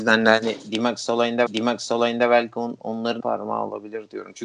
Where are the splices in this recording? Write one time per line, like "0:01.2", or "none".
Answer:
0:01.5
0:03.2